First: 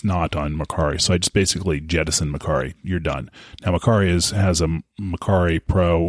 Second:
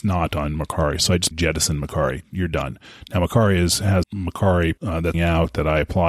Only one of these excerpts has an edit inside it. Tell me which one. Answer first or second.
second